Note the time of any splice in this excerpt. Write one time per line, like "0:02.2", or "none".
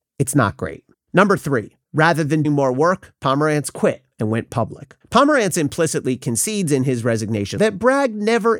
0:00.9
0:01.8
0:02.4
0:03.2
0:04.1
0:05.0
0:07.6